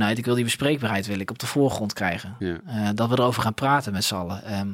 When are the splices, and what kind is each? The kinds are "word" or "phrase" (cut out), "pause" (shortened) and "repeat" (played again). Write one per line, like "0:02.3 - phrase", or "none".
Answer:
none